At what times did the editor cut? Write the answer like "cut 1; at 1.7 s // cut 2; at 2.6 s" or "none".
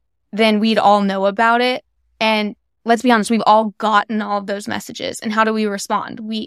none